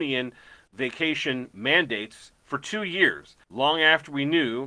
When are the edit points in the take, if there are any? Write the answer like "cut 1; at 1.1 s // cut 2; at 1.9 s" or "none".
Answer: cut 1; at 3.4 s